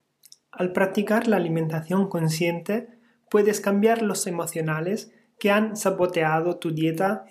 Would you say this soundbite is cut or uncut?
cut